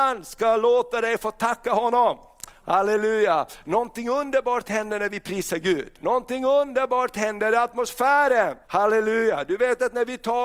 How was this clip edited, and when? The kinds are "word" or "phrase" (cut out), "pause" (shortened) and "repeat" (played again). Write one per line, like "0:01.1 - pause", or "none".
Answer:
0:06.0 - pause
0:08.6 - pause